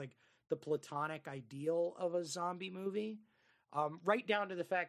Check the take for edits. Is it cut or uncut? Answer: uncut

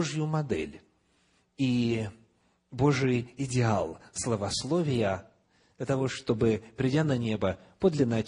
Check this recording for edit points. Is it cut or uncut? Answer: uncut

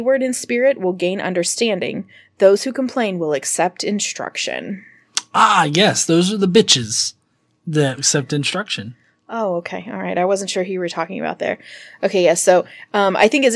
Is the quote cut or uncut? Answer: cut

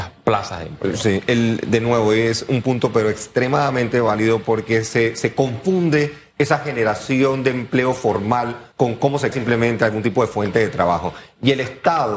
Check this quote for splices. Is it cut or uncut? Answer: cut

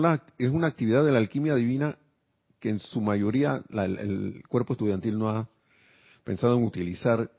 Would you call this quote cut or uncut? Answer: uncut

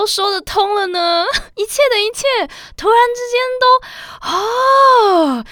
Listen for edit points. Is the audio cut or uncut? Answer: cut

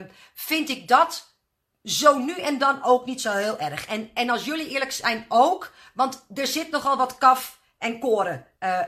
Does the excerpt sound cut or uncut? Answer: uncut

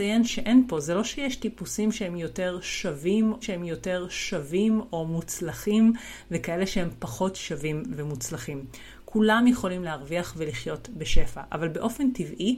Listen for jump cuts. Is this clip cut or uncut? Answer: cut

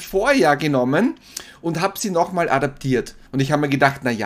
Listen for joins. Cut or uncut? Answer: cut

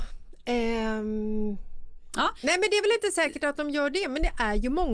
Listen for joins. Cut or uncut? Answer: uncut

